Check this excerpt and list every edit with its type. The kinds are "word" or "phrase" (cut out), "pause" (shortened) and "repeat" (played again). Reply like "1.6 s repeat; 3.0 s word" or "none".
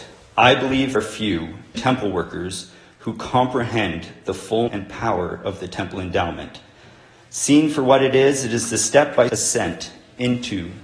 0.9 s word; 1.7 s word; 4.7 s word; 9.3 s word